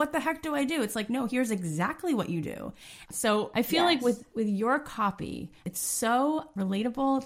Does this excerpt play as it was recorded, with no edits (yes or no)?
no